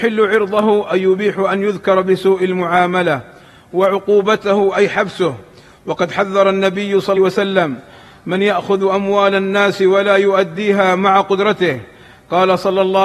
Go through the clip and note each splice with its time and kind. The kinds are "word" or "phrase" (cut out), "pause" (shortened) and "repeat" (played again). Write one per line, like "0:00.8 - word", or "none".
0:07.2 - phrase